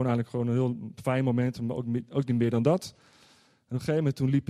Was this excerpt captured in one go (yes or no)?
yes